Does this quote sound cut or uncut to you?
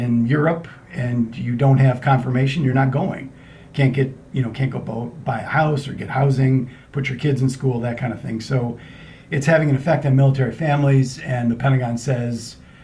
uncut